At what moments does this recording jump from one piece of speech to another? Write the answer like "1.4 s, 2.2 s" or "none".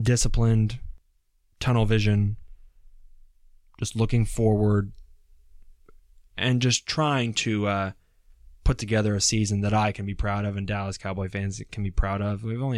none